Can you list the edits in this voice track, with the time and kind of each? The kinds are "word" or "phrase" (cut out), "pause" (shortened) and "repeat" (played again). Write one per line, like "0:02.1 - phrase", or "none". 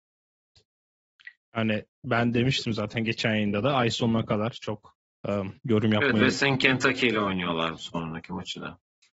0:05.0 - pause
0:05.6 - pause